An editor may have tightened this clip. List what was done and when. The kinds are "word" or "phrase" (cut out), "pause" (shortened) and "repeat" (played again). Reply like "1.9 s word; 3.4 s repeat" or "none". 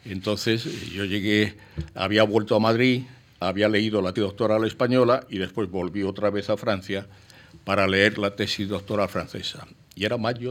4.2 s word